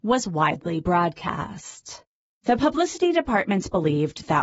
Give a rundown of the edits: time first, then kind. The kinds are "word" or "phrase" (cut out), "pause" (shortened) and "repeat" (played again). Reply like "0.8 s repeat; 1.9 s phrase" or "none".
none